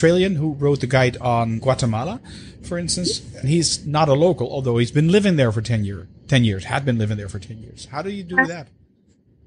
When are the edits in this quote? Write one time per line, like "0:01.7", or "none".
0:01.6
0:03.4